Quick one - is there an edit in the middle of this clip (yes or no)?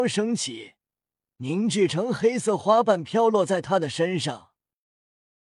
no